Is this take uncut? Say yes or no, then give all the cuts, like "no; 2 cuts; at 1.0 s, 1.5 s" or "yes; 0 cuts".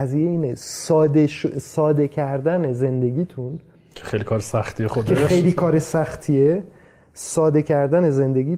yes; 0 cuts